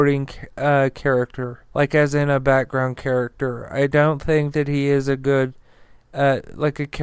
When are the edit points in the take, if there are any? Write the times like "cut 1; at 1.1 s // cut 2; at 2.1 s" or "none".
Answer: cut 1; at 1.7 s